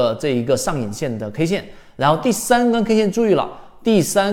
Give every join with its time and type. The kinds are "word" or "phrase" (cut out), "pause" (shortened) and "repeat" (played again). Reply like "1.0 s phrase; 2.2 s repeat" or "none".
none